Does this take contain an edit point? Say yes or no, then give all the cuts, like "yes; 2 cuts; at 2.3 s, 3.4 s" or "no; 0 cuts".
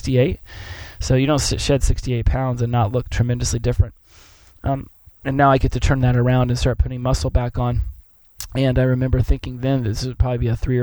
no; 0 cuts